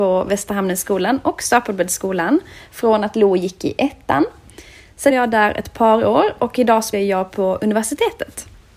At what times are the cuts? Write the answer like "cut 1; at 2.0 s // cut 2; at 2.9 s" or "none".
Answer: cut 1; at 5.1 s // cut 2; at 6.9 s